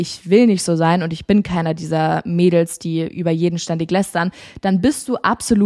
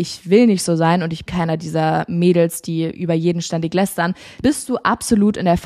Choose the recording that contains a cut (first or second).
second